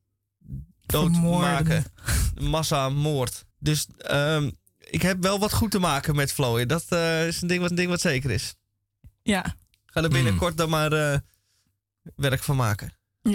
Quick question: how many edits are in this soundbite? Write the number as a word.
two